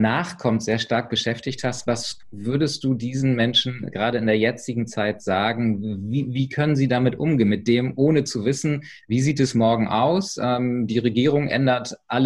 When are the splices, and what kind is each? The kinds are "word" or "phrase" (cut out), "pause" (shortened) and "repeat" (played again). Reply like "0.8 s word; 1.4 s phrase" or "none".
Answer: none